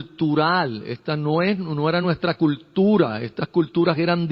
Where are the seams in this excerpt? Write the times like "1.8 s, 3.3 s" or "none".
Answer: none